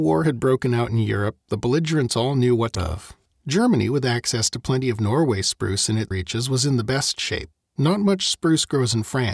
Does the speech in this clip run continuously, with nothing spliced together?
no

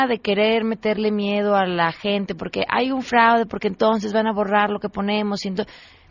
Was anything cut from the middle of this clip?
no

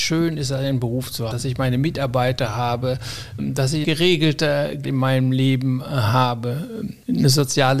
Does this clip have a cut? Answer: yes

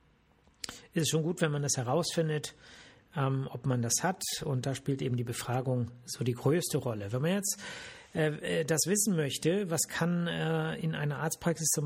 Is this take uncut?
yes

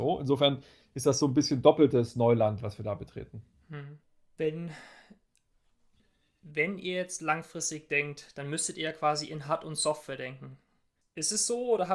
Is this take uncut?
yes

